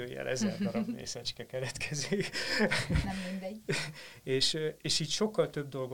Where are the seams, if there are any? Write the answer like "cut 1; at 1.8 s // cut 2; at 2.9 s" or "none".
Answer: none

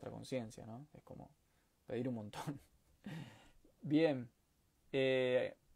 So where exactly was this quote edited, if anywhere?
none

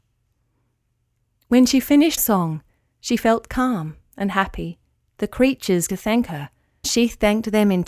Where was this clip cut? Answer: cut 1; at 2.2 s // cut 2; at 5.0 s // cut 3; at 5.9 s // cut 4; at 6.8 s

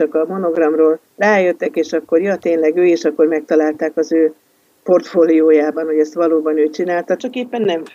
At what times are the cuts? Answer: cut 1; at 1.1 s

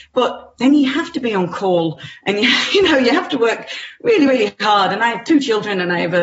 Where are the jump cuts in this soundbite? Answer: none

